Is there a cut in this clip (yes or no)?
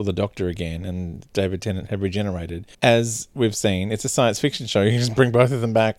yes